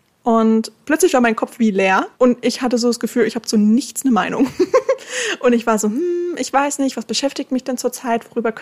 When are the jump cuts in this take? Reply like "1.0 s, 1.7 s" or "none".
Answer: 2.1 s